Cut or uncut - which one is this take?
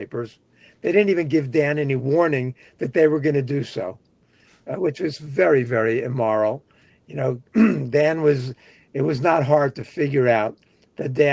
uncut